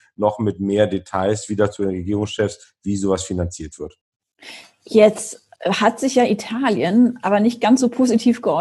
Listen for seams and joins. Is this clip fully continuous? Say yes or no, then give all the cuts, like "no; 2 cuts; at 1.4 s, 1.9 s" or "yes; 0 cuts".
no; 2 cuts; at 1.7 s, 5.5 s